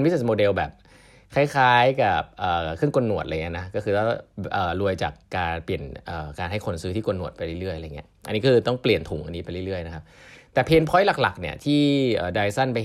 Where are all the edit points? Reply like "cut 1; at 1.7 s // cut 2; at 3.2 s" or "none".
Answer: none